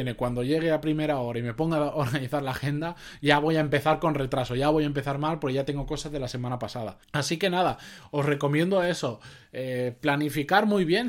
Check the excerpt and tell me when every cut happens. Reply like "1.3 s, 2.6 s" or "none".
7.0 s